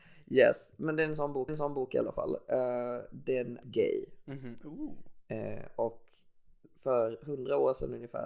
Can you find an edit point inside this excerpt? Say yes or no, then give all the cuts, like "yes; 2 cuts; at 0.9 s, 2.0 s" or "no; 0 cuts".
yes; 2 cuts; at 1.5 s, 3.6 s